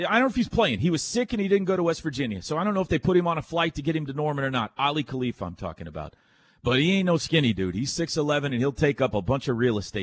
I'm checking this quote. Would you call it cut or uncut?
uncut